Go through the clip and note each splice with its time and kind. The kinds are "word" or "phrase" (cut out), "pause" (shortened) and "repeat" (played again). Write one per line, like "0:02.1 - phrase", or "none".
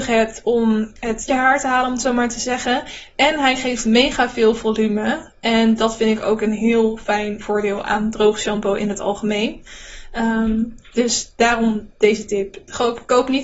0:01.3 - phrase